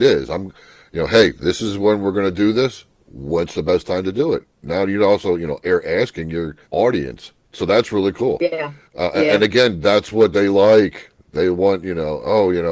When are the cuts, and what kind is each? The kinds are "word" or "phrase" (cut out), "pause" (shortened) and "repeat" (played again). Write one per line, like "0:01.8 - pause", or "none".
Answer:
0:06.6 - pause
0:08.8 - pause